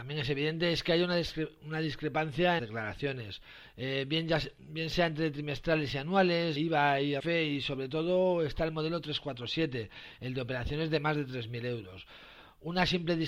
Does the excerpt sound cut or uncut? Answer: cut